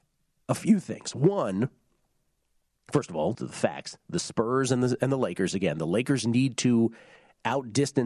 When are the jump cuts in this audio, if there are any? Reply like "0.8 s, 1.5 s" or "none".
3.3 s